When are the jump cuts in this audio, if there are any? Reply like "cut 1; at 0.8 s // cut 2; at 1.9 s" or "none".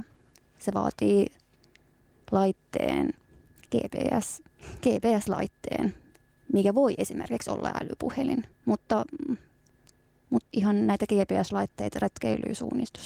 cut 1; at 4.5 s // cut 2; at 8.5 s // cut 3; at 10.5 s